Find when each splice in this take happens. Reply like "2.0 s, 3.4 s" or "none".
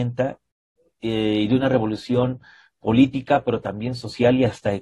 none